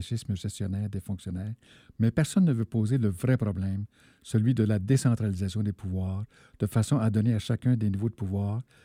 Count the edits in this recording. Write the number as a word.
zero